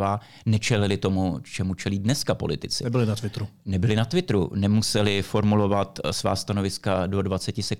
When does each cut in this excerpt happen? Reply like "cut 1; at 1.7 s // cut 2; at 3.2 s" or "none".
none